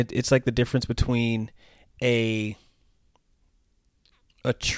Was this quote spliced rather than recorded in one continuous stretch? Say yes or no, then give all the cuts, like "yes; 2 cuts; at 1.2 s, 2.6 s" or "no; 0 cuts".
no; 0 cuts